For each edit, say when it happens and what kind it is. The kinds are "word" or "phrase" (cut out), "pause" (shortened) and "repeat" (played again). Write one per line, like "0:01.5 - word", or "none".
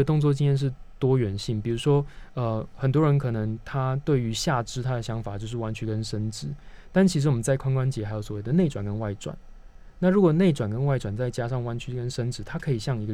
none